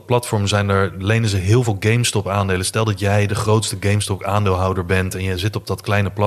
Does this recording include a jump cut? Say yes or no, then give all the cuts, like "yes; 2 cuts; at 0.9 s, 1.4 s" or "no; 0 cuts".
no; 0 cuts